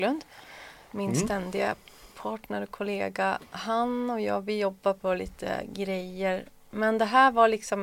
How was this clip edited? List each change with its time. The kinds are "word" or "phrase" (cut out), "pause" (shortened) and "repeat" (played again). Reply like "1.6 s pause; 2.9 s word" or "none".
none